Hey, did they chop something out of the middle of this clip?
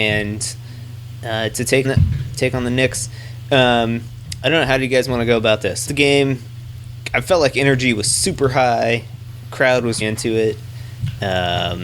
yes; 3 cuts; at 1.8 s, 5.9 s, 10.0 s

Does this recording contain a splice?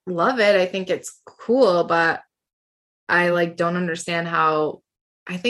no; 0 cuts

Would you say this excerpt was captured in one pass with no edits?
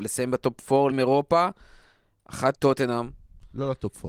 no; 2 cuts; at 0.9 s, 2.5 s

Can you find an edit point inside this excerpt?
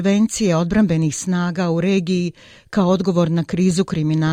no; 0 cuts

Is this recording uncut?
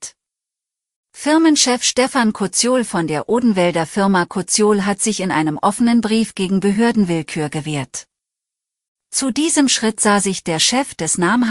yes; 0 cuts

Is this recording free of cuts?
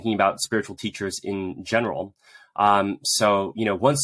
yes; 0 cuts

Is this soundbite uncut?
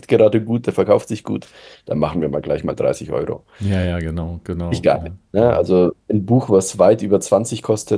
yes; 0 cuts

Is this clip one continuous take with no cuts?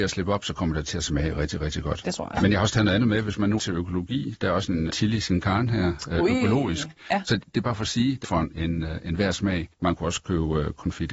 no; 4 cuts; at 3.6 s, 4.9 s, 8.2 s, 9.7 s

